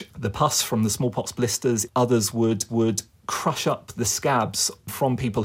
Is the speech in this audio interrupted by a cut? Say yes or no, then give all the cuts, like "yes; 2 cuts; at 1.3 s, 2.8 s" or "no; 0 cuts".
yes; 3 cuts; at 1.9 s, 2.7 s, 4.0 s